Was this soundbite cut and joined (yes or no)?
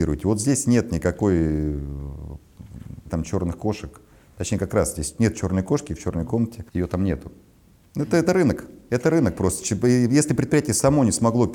yes